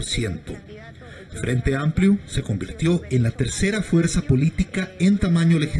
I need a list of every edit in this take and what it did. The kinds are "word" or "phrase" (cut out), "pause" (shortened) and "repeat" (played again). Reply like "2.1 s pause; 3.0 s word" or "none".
none